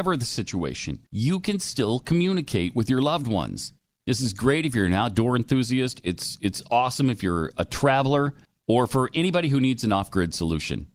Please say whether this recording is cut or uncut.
cut